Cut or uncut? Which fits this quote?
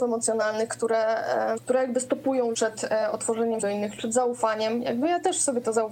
cut